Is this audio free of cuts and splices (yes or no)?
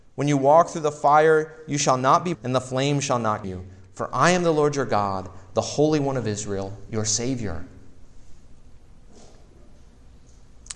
no